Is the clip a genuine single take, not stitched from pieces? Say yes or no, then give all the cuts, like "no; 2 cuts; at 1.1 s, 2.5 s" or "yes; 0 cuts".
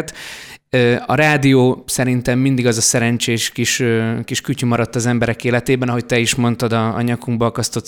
yes; 0 cuts